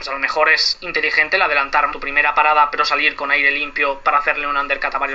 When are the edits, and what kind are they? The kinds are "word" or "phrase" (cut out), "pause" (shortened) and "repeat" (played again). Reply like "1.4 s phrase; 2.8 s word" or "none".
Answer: 1.9 s word